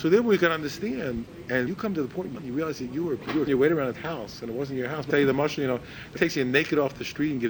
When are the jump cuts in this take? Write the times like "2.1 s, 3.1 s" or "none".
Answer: 1.7 s, 2.3 s, 3.5 s, 3.9 s, 5.1 s, 6.2 s